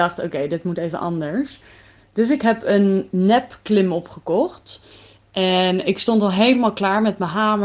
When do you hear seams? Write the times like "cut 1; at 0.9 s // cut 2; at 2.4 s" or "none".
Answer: none